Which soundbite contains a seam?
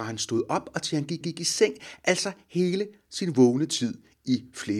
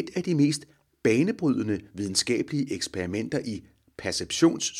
first; 1 cut; at 1.2 s

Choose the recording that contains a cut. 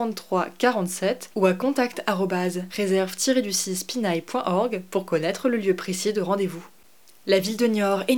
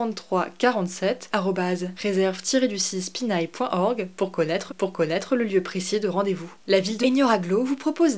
second; 4 cuts; at 1.3 s, 4.7 s, 6.6 s, 7.0 s

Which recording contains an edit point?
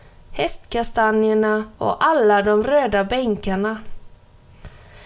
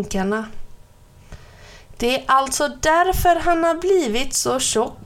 first; 1 cut; at 1.7 s

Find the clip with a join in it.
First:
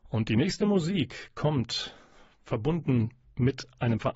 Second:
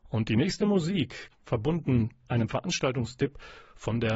second; 2 cuts; at 1.3 s, 2.2 s

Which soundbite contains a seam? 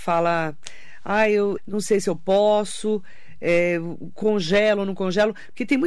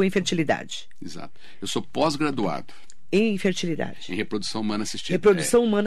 first; 1 cut; at 1.6 s

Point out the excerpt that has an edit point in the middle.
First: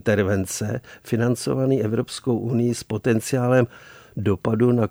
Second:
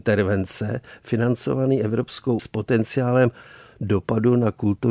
second; 1 cut; at 2.4 s

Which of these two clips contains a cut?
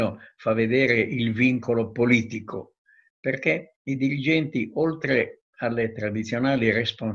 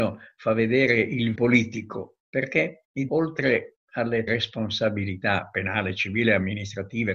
second; 4 cuts; at 1.3 s, 2.2 s, 3.1 s, 4.3 s

